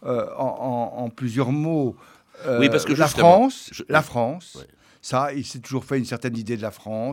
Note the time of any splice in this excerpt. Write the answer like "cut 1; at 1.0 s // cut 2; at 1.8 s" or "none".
none